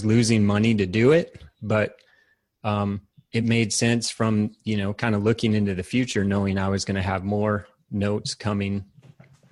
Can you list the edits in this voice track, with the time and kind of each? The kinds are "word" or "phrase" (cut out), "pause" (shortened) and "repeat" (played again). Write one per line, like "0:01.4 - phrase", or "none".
none

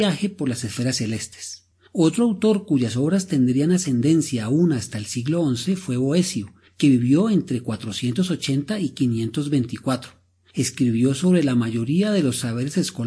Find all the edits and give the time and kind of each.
none

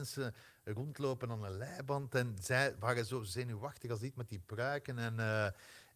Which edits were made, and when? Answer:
none

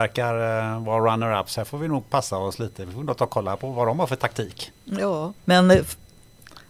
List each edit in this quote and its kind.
0:05.4 - pause

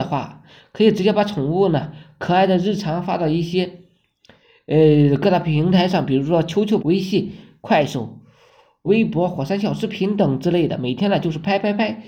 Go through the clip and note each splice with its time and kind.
0:06.8 - word
0:08.9 - word

